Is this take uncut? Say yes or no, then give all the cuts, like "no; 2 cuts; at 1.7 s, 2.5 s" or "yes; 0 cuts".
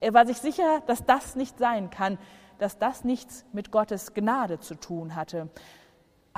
yes; 0 cuts